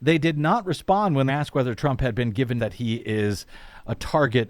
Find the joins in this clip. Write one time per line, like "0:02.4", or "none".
0:01.3
0:02.6